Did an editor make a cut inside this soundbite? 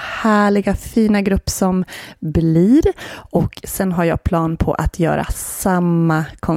no; 0 cuts

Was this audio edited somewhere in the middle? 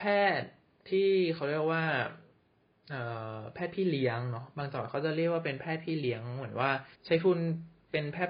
yes; 1 cut; at 6.9 s

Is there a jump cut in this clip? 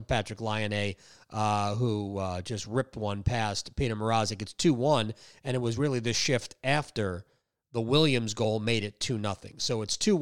no; 0 cuts

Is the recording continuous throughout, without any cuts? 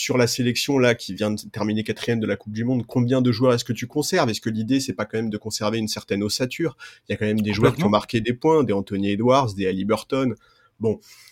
yes; 0 cuts

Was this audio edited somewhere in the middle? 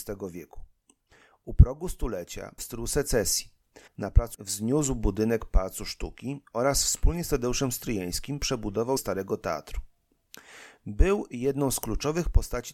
yes; 4 cuts; at 2.6 s, 3.9 s, 4.3 s, 9.0 s

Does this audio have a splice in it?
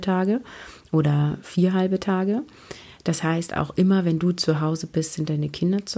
no; 0 cuts

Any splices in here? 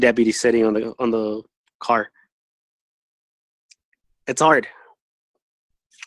no; 0 cuts

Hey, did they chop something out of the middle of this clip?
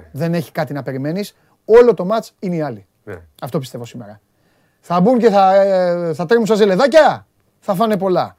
no; 0 cuts

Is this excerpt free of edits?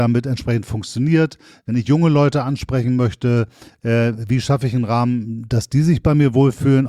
yes; 0 cuts

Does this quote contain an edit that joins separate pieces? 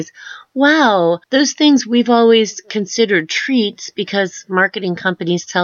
yes; 1 cut; at 1.2 s

